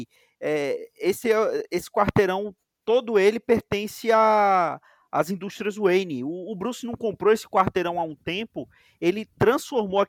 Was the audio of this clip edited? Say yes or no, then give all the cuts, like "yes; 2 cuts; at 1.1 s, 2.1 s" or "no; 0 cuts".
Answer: no; 0 cuts